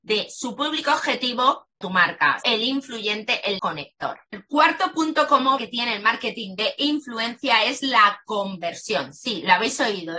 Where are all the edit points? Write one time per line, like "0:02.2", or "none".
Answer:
0:01.8
0:02.4
0:03.6
0:04.3
0:05.6